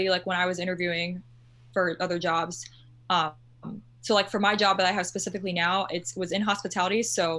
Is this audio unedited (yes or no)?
yes